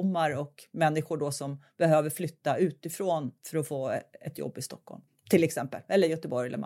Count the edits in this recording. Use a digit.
2